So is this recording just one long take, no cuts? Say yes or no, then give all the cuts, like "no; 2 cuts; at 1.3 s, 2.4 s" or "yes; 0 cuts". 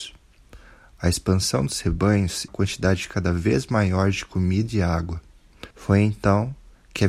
no; 2 cuts; at 2.5 s, 5.7 s